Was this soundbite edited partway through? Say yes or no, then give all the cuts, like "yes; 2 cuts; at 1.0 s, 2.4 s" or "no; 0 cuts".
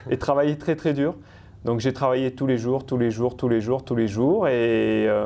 no; 0 cuts